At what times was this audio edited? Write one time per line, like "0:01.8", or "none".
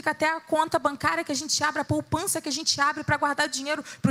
none